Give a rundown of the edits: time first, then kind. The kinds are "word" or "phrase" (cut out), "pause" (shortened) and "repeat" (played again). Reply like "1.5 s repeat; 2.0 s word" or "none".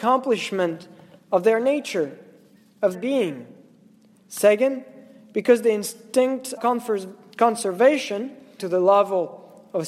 2.9 s word; 6.6 s word; 8.6 s word